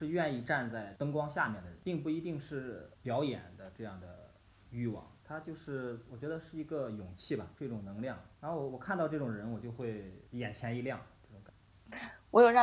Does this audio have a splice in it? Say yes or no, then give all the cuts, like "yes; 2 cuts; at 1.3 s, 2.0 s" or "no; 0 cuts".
no; 0 cuts